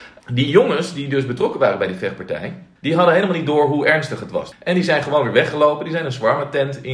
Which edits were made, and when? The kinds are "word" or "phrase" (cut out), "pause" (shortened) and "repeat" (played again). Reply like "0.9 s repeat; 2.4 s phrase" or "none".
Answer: none